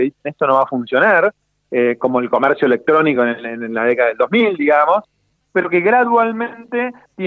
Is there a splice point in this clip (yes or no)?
no